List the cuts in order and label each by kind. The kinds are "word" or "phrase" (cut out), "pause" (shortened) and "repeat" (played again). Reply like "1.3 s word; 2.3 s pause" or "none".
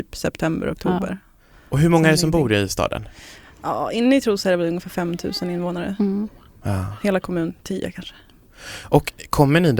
none